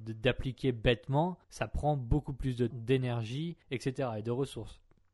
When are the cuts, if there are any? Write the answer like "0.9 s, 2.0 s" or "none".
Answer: 1.4 s, 2.7 s, 3.6 s